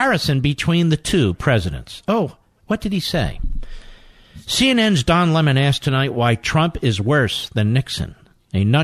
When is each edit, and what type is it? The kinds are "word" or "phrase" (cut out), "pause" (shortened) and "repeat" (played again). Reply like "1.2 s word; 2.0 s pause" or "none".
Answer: none